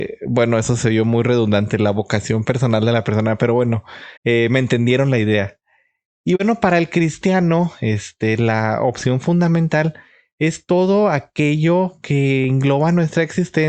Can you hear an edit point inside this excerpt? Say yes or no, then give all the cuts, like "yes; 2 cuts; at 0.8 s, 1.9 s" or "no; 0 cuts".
yes; 1 cut; at 4.2 s